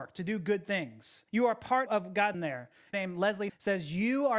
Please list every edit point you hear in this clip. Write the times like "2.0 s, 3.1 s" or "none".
1.3 s, 1.9 s, 2.3 s, 2.9 s, 3.5 s